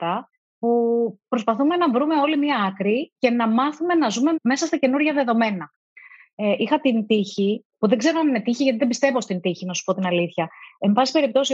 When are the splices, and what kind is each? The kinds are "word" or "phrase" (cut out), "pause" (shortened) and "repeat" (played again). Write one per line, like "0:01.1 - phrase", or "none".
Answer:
none